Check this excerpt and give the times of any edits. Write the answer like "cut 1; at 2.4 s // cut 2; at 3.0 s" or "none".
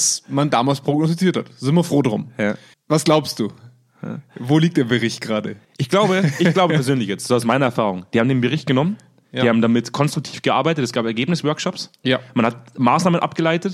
cut 1; at 2.7 s // cut 2; at 5.6 s

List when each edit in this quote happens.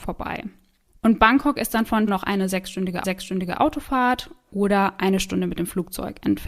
cut 1; at 2.1 s // cut 2; at 3.0 s

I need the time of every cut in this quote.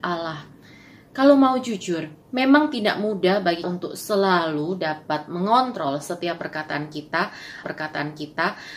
cut 1; at 2.2 s // cut 2; at 3.6 s // cut 3; at 7.6 s

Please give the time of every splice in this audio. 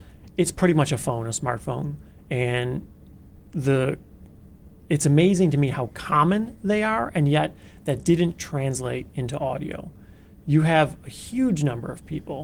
none

